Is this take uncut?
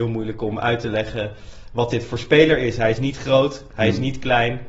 yes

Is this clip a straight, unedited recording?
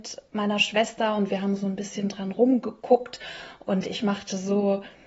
yes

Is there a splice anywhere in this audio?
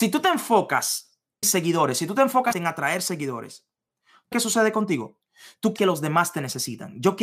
yes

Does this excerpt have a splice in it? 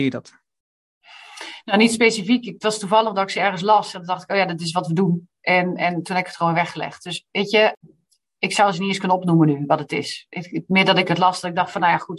no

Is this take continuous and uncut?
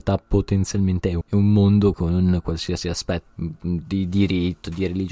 no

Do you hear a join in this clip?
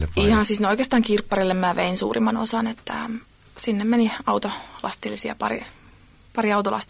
no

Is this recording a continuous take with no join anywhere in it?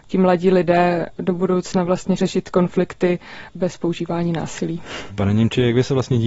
no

